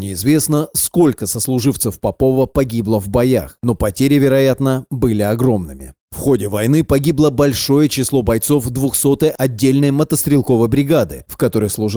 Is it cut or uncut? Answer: uncut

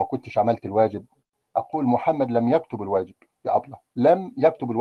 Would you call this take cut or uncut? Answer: uncut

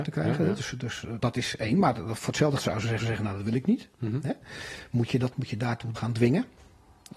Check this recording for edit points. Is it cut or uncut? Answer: cut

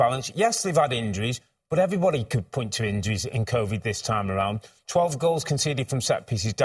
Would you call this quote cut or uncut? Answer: uncut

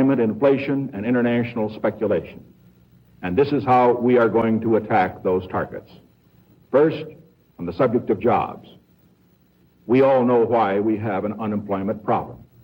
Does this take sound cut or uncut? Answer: uncut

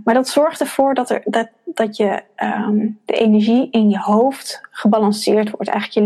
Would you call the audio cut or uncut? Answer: uncut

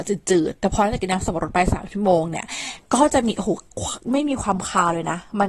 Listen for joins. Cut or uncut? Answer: cut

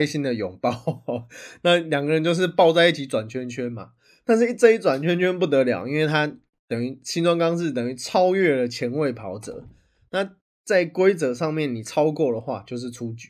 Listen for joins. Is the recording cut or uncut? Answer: uncut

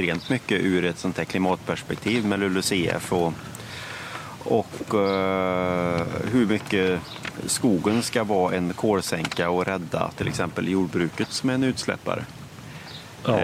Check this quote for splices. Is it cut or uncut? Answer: uncut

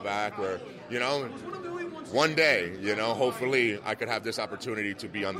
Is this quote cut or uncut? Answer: uncut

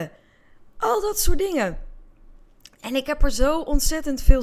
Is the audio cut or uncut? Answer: uncut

